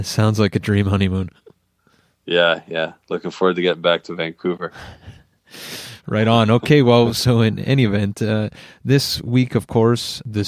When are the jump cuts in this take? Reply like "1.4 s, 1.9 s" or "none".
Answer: none